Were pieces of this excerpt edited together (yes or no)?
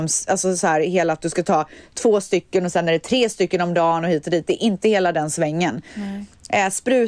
no